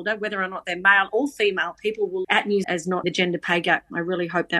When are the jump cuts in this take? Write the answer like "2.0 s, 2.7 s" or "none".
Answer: 2.2 s, 2.6 s, 3.0 s